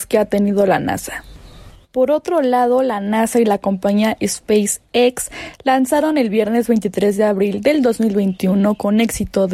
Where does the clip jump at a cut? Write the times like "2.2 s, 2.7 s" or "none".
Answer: none